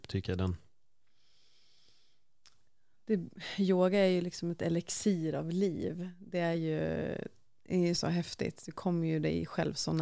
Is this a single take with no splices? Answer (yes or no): yes